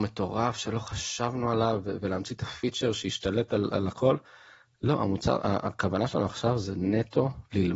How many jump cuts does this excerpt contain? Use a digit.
0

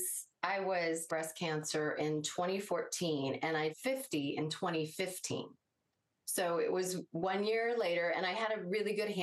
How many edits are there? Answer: 2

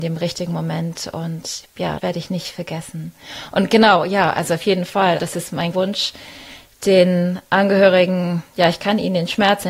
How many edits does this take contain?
3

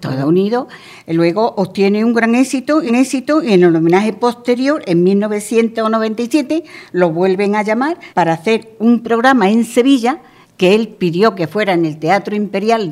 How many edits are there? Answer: 3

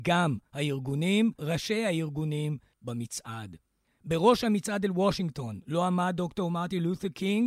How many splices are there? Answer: 2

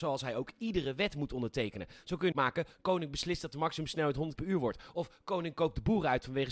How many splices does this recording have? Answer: 2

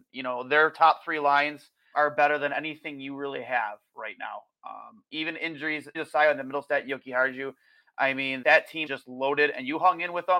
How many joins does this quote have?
4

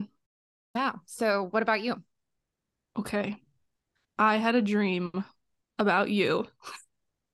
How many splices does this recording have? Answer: 0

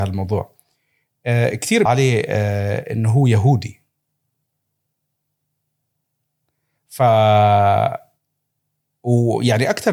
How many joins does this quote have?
1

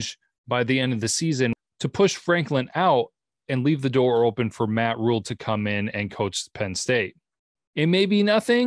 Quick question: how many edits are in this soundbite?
0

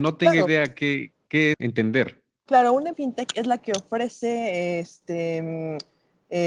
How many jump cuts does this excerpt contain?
2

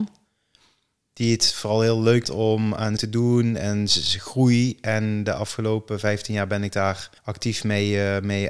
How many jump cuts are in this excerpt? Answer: 3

